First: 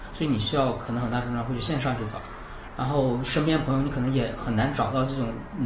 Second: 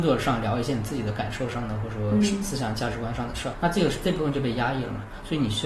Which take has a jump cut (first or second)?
second